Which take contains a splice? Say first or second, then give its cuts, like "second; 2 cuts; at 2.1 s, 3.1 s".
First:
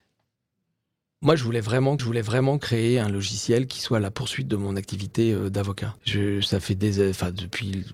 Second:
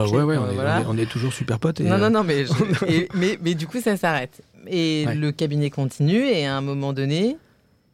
first; 2 cuts; at 2.0 s, 6.0 s